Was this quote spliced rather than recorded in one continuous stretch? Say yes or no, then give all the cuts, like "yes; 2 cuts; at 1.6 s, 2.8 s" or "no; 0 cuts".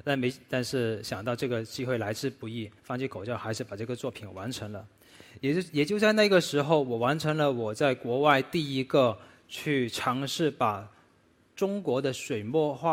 yes; 1 cut; at 2.8 s